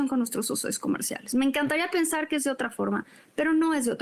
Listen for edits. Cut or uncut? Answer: uncut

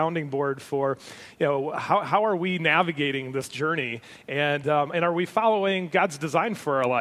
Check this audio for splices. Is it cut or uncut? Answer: uncut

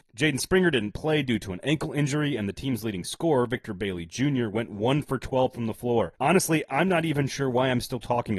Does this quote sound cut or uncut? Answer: cut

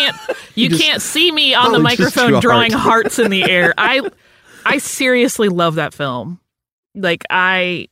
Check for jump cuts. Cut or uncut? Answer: uncut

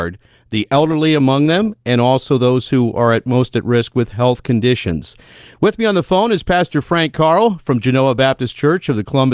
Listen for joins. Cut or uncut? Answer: uncut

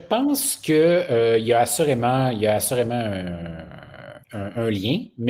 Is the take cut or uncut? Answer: cut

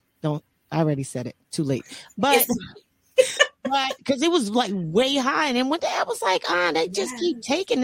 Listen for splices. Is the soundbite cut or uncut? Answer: uncut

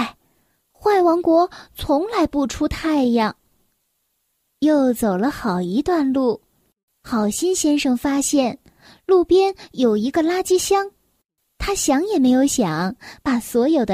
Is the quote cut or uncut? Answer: uncut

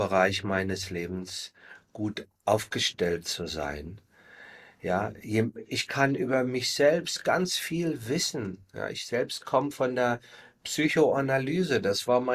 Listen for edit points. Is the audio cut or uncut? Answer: uncut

